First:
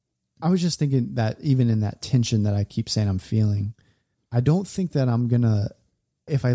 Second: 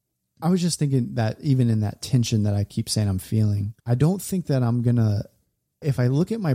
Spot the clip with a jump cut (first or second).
second